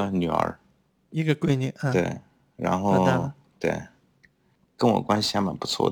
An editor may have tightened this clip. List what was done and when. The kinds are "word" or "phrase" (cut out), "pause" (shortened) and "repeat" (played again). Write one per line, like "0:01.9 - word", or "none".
none